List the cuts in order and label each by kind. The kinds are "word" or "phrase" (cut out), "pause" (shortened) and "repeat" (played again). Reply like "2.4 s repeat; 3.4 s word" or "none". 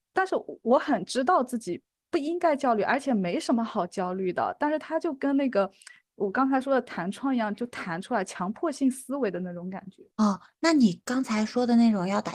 10.1 s pause